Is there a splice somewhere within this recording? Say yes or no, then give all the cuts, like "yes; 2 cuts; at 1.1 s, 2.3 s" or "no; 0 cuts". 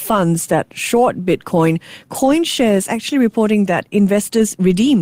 no; 0 cuts